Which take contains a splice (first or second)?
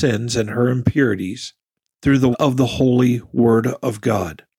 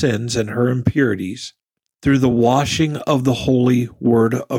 first